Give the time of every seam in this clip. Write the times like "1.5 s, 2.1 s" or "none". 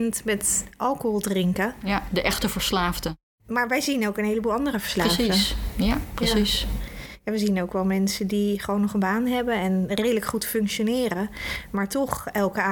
none